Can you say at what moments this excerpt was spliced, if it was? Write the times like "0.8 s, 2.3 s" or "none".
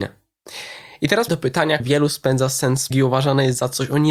1.3 s, 1.8 s, 2.9 s